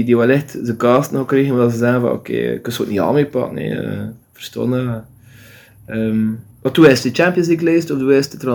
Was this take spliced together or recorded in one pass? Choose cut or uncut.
cut